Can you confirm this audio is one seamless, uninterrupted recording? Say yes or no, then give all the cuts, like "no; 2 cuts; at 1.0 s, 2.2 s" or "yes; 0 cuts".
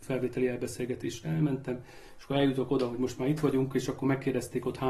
yes; 0 cuts